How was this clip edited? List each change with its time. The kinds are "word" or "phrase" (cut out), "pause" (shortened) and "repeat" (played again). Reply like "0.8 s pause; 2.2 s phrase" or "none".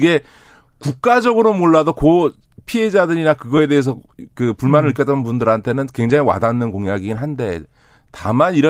none